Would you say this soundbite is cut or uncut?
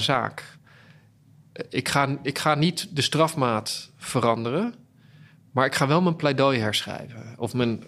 uncut